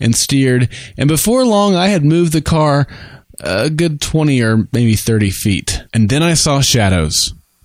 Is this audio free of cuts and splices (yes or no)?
no